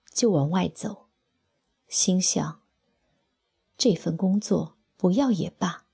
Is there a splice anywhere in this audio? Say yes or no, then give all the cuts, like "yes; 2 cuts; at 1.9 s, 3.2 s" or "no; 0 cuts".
no; 0 cuts